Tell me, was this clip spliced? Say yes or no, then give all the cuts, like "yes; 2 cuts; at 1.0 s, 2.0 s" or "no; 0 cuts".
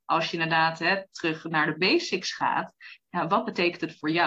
no; 0 cuts